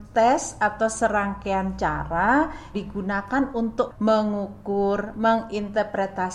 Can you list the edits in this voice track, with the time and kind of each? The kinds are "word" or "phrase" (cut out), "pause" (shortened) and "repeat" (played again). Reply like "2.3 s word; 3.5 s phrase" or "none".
2.7 s word; 3.9 s word

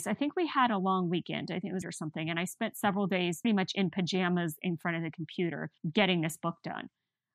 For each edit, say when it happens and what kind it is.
1.8 s phrase; 3.4 s word; 5.8 s pause

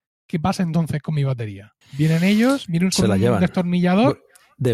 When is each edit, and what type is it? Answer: 1.8 s pause; 2.9 s word

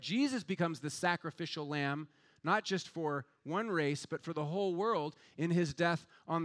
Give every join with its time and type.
none

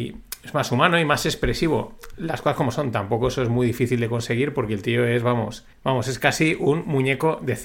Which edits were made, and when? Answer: 5.7 s pause

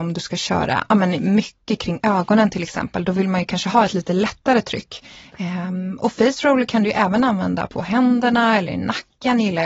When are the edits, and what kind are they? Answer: 7.7 s word

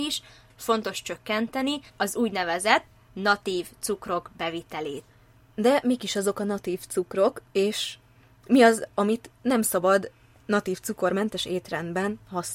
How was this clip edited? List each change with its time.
1.9 s pause; 7.5 s pause

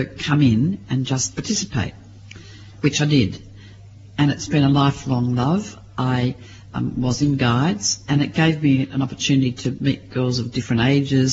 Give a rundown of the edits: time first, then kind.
none

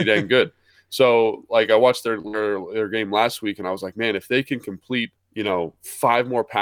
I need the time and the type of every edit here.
5.2 s pause

